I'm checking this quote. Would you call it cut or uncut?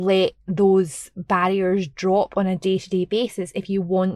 uncut